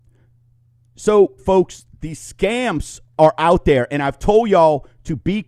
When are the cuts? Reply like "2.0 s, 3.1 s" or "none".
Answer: 1.4 s